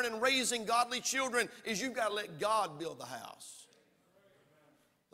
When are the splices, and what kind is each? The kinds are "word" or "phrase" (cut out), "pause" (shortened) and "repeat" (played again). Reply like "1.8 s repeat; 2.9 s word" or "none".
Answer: none